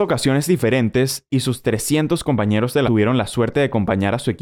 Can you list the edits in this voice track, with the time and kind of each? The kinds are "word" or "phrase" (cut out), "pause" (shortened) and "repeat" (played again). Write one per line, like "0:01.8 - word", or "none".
0:01.3 - word
0:02.8 - word